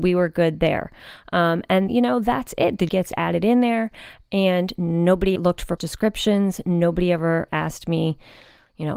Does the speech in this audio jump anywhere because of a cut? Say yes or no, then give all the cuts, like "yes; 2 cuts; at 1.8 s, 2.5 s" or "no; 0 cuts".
yes; 4 cuts; at 1.9 s, 2.9 s, 5.4 s, 5.8 s